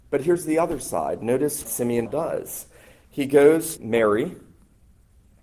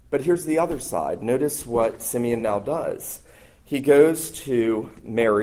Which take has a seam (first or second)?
first